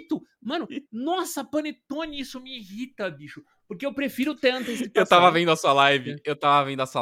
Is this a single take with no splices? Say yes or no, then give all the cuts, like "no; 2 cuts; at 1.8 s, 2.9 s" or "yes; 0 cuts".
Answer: yes; 0 cuts